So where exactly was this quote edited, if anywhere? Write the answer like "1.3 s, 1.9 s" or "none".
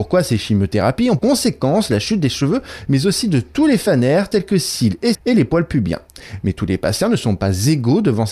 1.2 s, 5.1 s